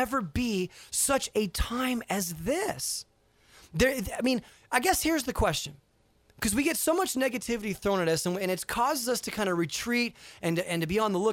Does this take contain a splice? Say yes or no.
no